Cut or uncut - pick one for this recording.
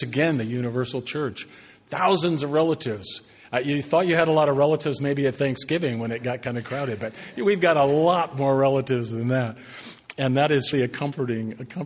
cut